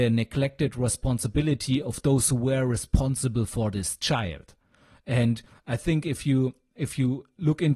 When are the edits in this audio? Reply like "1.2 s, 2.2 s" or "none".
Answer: none